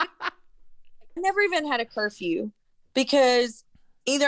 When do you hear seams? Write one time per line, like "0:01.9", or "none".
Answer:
0:01.2